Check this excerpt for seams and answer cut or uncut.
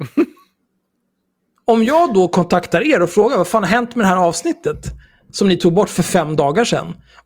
uncut